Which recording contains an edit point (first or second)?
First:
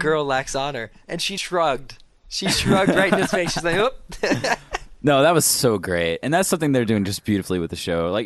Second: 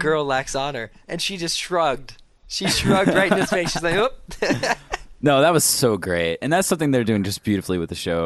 first